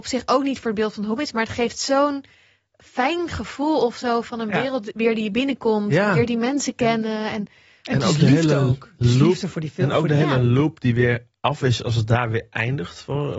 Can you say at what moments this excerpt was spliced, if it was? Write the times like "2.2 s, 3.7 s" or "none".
none